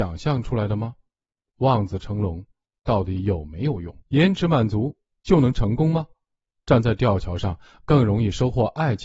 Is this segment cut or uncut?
cut